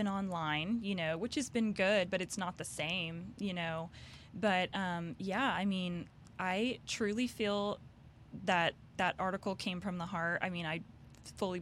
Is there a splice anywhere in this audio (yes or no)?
no